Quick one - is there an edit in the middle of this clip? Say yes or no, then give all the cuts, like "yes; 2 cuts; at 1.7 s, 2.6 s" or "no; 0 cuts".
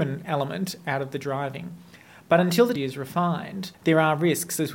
yes; 2 cuts; at 2.8 s, 3.7 s